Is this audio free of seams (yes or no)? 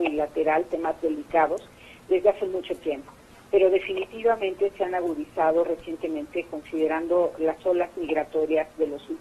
yes